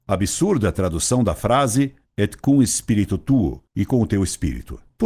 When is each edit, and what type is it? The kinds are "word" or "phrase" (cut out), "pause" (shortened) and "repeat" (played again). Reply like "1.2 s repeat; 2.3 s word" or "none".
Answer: 3.7 s pause